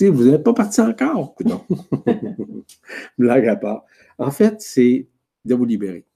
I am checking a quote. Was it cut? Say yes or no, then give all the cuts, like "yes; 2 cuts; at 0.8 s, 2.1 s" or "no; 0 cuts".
no; 0 cuts